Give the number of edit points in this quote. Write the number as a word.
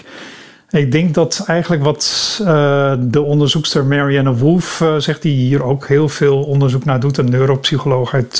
zero